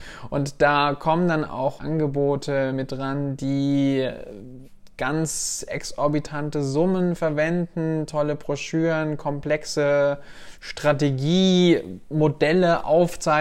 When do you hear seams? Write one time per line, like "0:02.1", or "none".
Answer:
0:01.8